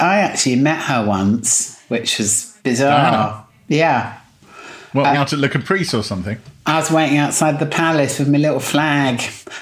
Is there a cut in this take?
yes; 2 cuts; at 2.6 s, 5.1 s

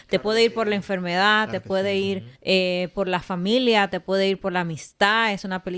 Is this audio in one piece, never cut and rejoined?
no; 1 cut; at 2.3 s

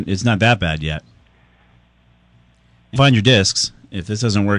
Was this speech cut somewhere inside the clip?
yes; 1 cut; at 3.0 s

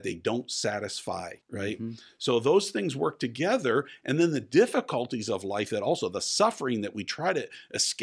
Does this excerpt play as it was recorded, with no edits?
no; 1 cut; at 1.4 s

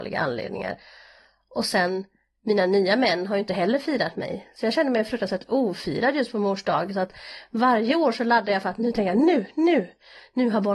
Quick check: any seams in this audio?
no; 0 cuts

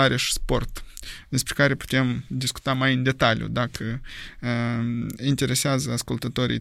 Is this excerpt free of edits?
yes; 0 cuts

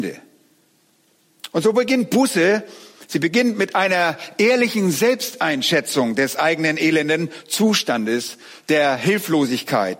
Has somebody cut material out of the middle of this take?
no; 0 cuts

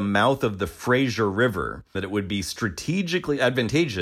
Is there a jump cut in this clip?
yes; 1 cut; at 1.9 s

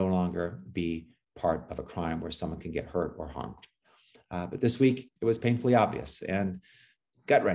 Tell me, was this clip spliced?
yes; 1 cut; at 5.2 s

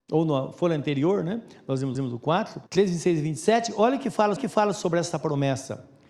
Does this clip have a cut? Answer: yes; 3 cuts; at 1.9 s, 2.7 s, 4.4 s

